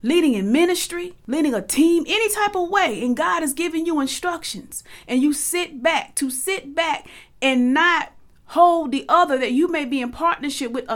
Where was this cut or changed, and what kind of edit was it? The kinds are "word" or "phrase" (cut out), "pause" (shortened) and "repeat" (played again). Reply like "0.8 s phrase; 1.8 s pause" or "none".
none